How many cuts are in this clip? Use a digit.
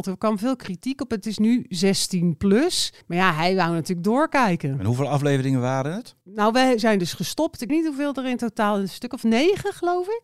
3